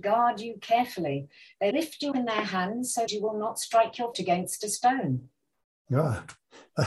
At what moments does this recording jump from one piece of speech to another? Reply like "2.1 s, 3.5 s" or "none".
1.7 s, 2.1 s, 3.1 s, 4.1 s